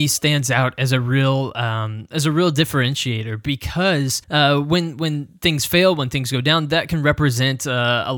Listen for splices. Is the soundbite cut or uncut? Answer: cut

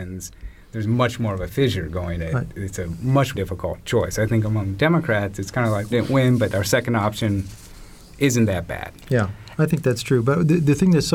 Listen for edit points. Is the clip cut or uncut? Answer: cut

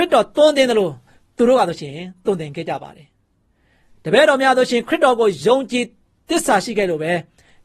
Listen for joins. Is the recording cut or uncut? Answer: uncut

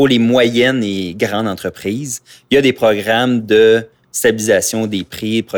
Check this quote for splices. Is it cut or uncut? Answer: uncut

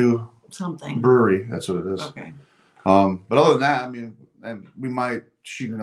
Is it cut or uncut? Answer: uncut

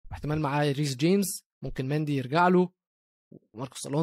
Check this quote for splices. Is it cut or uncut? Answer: cut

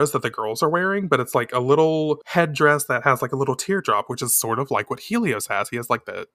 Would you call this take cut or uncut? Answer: uncut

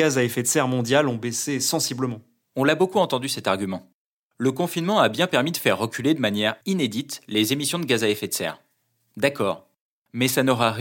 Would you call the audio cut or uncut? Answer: uncut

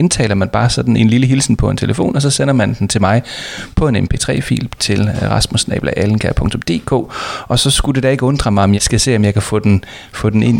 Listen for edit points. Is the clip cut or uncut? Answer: cut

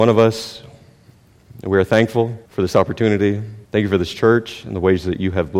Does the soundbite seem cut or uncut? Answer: cut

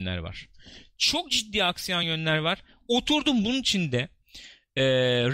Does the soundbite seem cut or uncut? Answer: uncut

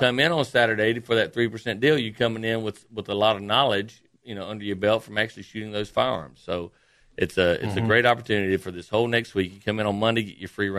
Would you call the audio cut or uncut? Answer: uncut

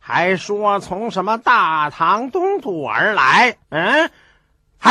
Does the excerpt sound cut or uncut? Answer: cut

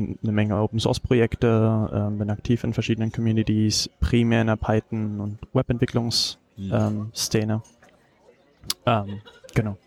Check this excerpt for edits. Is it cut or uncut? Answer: uncut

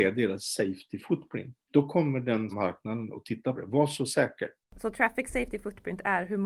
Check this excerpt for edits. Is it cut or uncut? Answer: cut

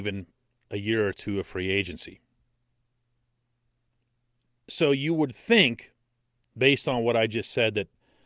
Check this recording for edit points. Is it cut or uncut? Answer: uncut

